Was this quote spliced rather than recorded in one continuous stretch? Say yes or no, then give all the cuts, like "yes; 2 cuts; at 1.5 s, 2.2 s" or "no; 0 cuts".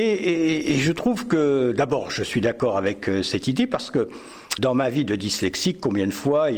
yes; 1 cut; at 4.6 s